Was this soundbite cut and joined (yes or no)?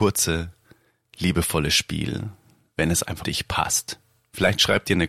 yes